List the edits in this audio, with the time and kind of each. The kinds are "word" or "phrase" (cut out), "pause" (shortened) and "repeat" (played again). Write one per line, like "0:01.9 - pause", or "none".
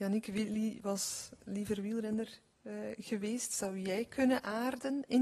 none